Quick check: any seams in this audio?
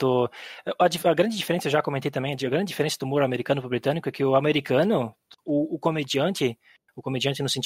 no; 0 cuts

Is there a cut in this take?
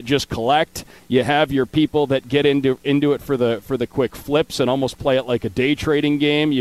no; 0 cuts

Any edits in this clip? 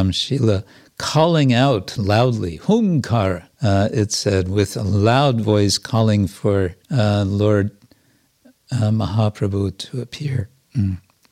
yes; 2 cuts; at 3.5 s, 6.8 s

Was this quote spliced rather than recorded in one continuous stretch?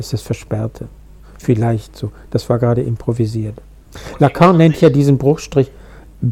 no; 0 cuts

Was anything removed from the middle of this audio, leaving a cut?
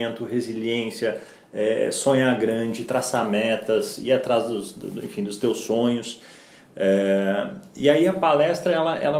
no; 0 cuts

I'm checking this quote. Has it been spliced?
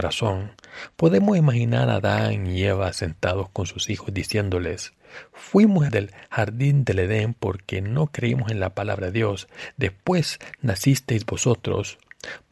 yes; 1 cut; at 5.9 s

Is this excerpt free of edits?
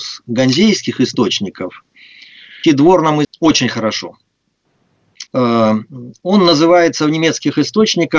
no; 3 cuts; at 2.6 s, 3.2 s, 5.3 s

